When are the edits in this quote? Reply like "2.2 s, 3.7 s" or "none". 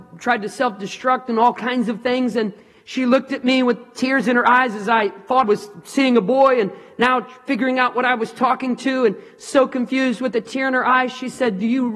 5.4 s